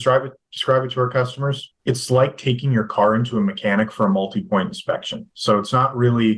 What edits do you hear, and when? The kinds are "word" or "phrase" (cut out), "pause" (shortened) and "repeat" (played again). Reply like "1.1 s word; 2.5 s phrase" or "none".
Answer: 1.8 s pause